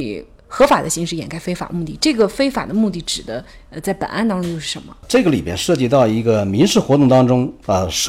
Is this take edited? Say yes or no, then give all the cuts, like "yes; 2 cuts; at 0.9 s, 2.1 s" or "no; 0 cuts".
no; 0 cuts